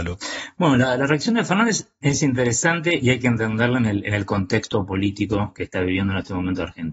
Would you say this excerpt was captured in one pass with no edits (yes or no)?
yes